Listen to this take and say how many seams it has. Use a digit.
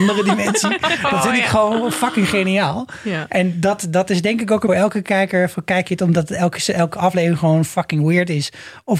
1